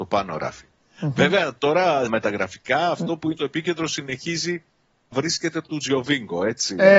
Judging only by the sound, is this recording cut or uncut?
cut